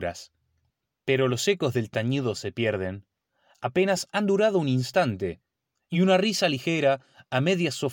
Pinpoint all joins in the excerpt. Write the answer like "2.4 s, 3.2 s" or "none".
none